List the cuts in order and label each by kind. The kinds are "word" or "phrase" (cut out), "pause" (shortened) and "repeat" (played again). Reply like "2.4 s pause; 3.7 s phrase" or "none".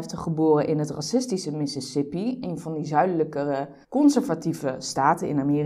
3.8 s pause